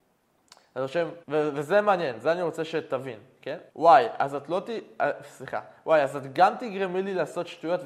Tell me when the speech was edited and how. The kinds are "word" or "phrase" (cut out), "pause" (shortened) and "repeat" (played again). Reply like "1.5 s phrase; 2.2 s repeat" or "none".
1.2 s pause; 3.7 s pause